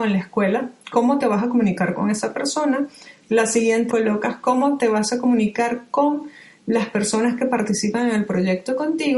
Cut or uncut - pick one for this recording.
cut